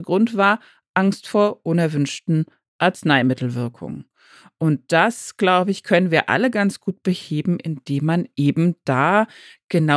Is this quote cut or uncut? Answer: uncut